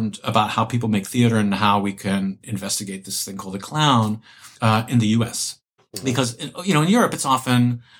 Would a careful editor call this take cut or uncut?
cut